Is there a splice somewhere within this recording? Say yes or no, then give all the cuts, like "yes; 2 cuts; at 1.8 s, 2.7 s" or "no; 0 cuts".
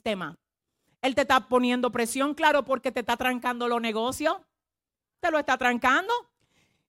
no; 0 cuts